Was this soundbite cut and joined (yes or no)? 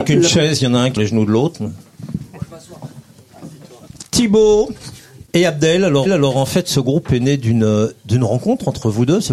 yes